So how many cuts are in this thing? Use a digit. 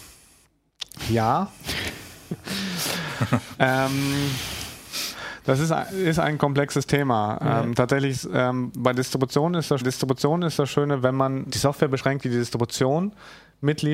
2